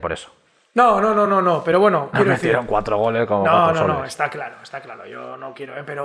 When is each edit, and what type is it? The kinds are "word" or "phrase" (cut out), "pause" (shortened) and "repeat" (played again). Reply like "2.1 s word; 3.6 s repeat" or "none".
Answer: none